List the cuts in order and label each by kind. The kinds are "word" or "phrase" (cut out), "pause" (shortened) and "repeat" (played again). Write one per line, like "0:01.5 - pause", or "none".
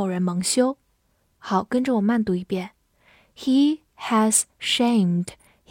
none